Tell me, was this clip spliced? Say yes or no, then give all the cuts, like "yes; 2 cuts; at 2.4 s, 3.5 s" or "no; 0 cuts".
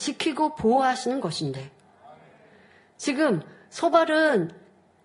no; 0 cuts